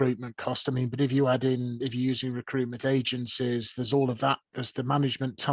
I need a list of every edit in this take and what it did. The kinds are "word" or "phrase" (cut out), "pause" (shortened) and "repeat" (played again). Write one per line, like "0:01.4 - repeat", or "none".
0:04.5 - word